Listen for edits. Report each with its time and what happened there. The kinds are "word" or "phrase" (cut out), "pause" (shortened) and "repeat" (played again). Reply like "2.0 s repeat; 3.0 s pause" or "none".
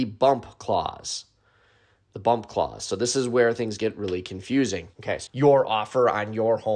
4.9 s pause; 5.3 s phrase